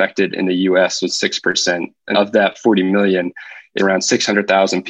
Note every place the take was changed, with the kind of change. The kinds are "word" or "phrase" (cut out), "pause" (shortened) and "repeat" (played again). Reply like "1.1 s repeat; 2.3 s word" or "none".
1.1 s word; 2.1 s word; 3.8 s word